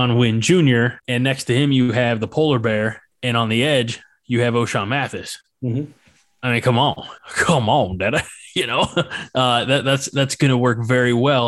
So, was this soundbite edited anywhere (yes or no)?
yes